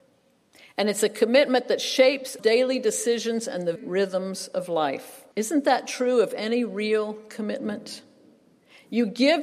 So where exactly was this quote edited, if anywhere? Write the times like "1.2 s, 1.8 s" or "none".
2.4 s, 3.8 s, 5.3 s